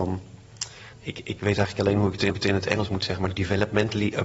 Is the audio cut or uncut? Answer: cut